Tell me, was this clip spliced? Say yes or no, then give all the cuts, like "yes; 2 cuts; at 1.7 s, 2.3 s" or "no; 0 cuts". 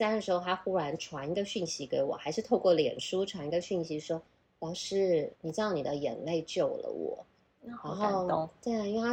yes; 2 cuts; at 4.3 s, 5.3 s